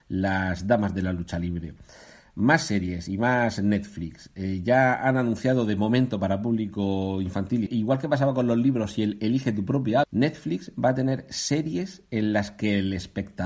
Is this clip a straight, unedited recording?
no; 2 cuts; at 7.7 s, 10.0 s

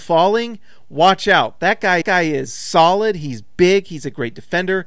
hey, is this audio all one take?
no; 1 cut; at 2.0 s

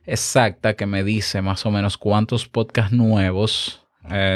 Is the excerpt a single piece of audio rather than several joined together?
yes; 0 cuts

